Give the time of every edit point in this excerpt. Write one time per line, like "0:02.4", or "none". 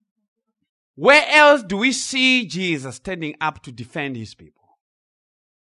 none